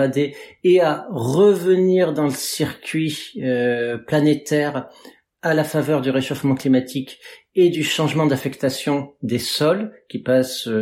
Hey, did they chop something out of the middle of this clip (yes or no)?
no